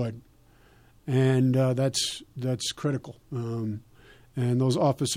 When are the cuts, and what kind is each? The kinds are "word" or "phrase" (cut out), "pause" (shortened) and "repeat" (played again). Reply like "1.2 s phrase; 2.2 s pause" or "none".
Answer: 3.2 s pause